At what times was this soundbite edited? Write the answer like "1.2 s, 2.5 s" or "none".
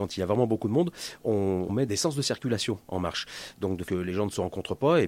1.9 s, 3.9 s